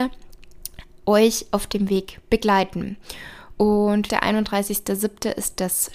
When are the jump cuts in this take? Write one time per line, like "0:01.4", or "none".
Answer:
0:04.1